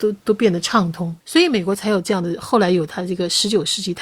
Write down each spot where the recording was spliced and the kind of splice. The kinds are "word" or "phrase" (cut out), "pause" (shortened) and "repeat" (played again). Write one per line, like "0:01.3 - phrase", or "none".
0:01.2 - pause